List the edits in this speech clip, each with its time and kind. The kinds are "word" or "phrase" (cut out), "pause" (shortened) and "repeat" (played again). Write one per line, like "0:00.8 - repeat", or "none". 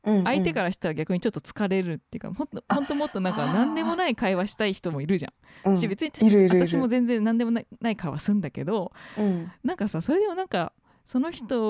none

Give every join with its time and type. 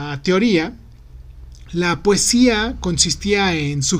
none

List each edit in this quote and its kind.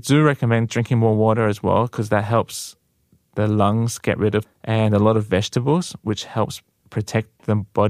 0:04.4 - phrase

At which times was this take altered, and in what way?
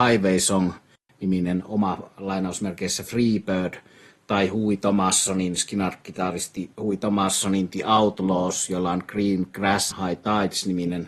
0:06.7 - pause
0:09.9 - word

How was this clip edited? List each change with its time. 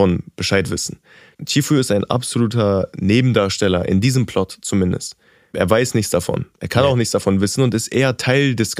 none

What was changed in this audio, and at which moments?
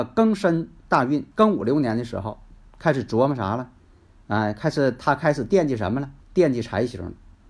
0:01.3 - pause
0:06.2 - pause

